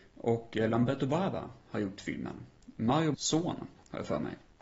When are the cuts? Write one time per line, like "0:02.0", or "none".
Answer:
0:03.1